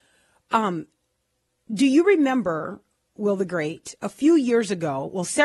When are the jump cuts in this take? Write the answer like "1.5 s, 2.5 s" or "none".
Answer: none